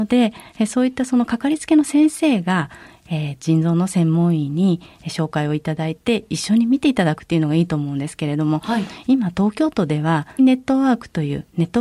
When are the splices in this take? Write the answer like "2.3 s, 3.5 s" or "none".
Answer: 10.4 s